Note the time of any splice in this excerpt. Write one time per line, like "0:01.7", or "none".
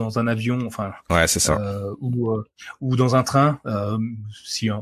none

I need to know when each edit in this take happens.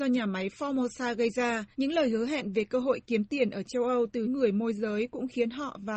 0:01.7
0:04.2

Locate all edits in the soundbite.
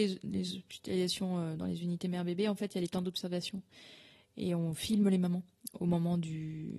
none

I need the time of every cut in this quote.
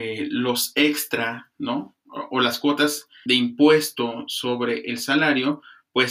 0:03.3

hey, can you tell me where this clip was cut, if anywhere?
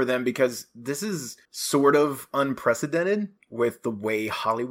0:01.4

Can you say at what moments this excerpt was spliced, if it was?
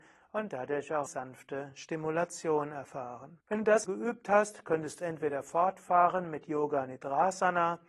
0:01.1
0:03.4
0:03.8
0:05.0

